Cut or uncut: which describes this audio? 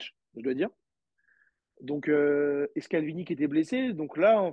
uncut